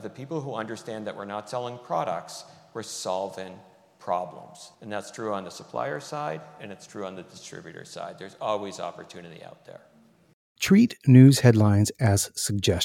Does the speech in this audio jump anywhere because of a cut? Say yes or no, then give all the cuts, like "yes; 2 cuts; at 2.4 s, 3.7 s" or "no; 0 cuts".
yes; 1 cut; at 4.7 s